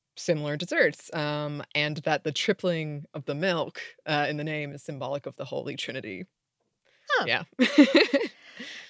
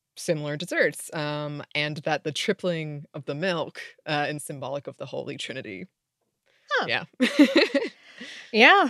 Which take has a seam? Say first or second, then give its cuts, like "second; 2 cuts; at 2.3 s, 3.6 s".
second; 1 cut; at 4.4 s